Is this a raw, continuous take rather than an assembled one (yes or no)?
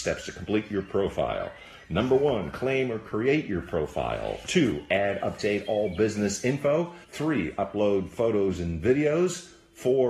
no